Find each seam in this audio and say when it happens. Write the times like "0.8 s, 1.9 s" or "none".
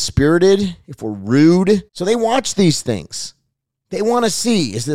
1.9 s